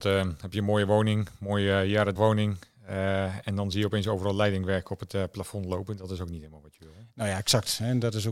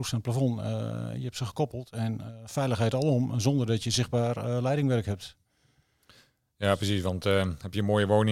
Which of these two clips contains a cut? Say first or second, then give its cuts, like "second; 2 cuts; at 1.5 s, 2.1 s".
first; 1 cut; at 2.2 s